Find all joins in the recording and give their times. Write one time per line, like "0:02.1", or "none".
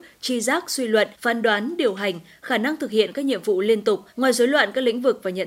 0:01.1
0:04.1